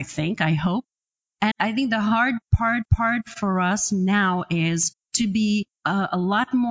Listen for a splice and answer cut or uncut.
cut